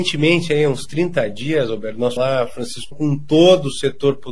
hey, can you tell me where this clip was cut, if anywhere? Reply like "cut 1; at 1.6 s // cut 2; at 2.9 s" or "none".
cut 1; at 2.2 s // cut 2; at 2.9 s